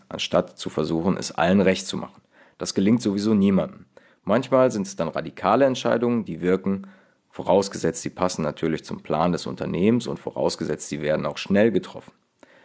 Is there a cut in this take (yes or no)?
no